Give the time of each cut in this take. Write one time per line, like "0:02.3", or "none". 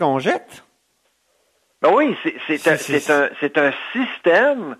none

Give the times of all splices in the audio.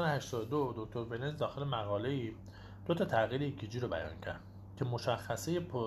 none

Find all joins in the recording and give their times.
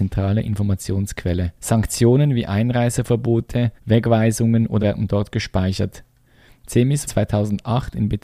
0:01.6
0:03.8
0:04.8
0:07.1

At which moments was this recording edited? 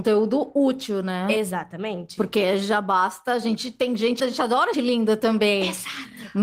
0:04.2
0:04.7

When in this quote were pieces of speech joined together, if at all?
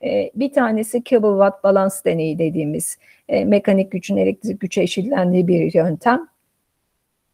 none

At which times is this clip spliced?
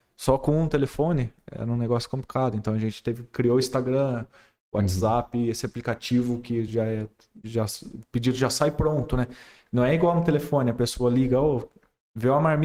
none

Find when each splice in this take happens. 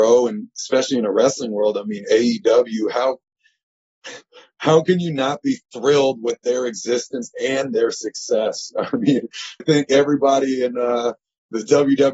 0:09.6

